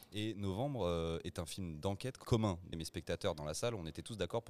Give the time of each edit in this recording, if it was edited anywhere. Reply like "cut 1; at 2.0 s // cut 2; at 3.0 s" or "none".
cut 1; at 2.2 s // cut 2; at 2.7 s